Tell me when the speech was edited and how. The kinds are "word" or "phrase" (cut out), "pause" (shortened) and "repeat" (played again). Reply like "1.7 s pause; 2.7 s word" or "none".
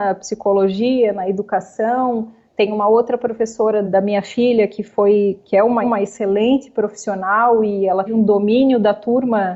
3.8 s word; 5.8 s repeat; 8.1 s word